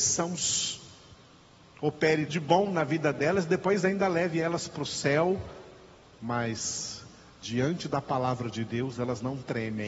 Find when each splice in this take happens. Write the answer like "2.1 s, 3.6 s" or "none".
2.3 s